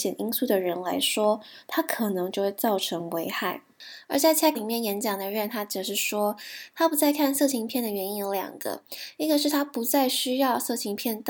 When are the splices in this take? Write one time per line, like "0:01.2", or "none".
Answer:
0:04.6